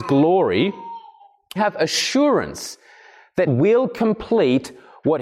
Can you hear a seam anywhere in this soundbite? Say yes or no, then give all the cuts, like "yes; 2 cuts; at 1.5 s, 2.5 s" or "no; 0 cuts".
yes; 2 cuts; at 1.6 s, 3.5 s